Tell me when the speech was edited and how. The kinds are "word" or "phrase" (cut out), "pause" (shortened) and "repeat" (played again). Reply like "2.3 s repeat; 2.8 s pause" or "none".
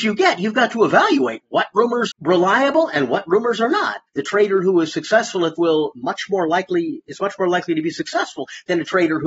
2.1 s word; 4.1 s pause; 5.6 s word